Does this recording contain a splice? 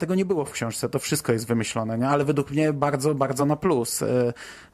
no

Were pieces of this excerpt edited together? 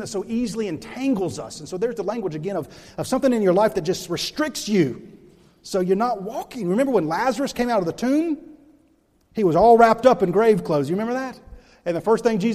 no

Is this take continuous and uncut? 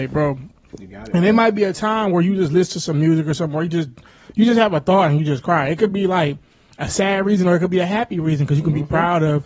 yes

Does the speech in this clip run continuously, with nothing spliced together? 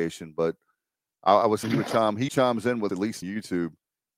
no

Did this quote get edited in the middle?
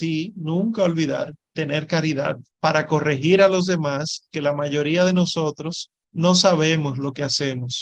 yes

